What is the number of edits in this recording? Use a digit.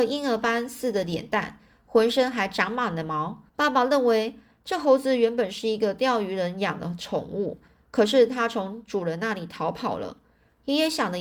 1